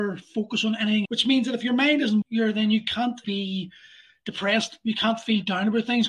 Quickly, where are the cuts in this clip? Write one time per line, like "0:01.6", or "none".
0:01.0
0:02.2
0:03.2